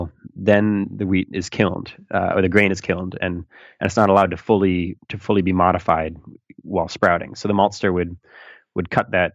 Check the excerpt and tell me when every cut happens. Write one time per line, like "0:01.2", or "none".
none